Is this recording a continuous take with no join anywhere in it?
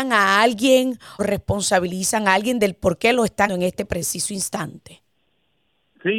no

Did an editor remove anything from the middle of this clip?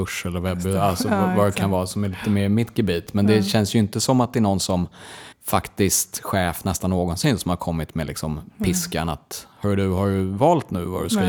yes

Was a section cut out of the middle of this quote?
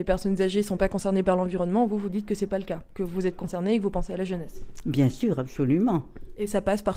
no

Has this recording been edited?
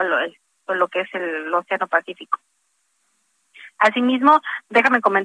no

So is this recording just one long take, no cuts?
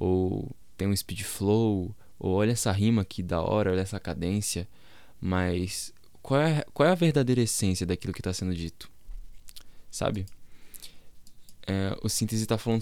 yes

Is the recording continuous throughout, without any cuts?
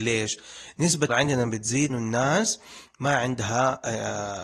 no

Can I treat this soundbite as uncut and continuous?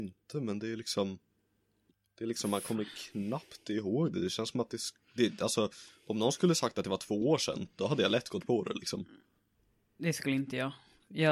yes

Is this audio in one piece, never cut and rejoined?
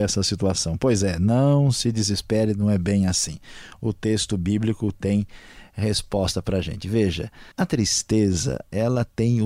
no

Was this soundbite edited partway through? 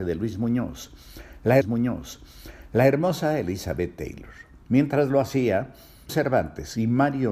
yes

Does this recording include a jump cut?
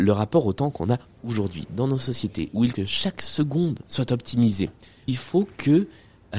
yes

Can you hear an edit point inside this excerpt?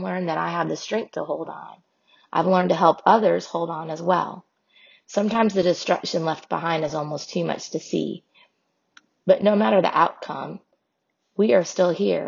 no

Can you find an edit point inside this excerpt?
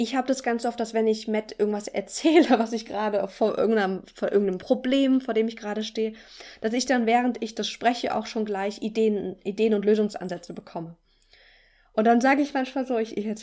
no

